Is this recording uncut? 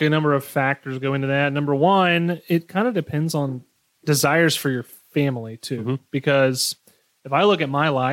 yes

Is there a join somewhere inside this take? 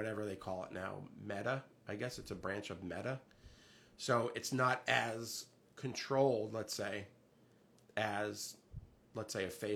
no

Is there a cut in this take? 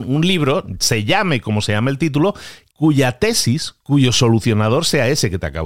no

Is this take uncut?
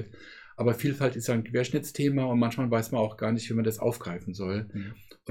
yes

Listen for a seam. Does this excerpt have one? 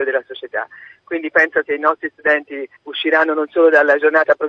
yes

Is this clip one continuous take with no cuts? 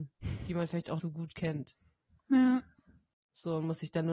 no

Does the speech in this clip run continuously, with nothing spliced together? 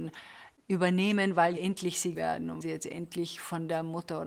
no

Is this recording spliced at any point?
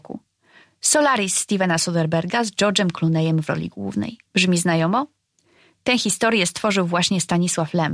yes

